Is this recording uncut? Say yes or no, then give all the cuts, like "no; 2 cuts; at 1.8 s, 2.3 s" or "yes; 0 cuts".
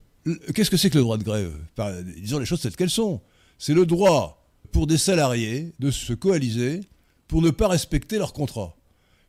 no; 2 cuts; at 4.6 s, 6.0 s